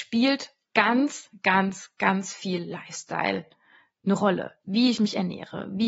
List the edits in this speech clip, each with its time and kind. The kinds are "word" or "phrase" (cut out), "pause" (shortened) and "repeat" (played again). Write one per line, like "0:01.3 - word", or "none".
0:04.6 - pause